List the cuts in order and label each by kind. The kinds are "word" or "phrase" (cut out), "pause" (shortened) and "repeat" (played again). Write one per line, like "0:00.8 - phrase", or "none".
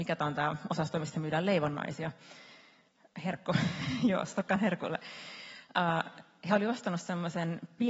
none